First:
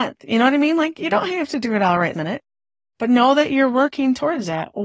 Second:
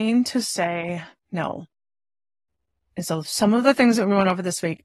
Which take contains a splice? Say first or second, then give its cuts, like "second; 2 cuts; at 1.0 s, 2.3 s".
first; 1 cut; at 2.1 s